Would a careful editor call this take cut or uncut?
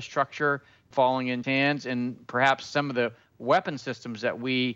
cut